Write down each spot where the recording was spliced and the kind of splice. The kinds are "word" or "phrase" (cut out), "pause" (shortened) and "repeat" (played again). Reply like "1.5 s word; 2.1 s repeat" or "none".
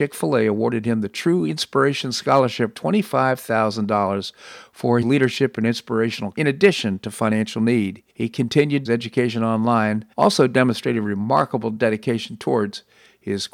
2.7 s word; 5.0 s word; 6.3 s word; 8.1 s pause; 8.8 s phrase; 10.1 s pause